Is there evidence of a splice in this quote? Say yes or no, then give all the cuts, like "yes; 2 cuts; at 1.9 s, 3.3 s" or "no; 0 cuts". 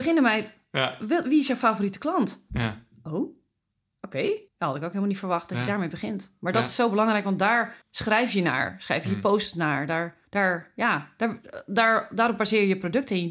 yes; 3 cuts; at 4.5 s, 7.8 s, 10.3 s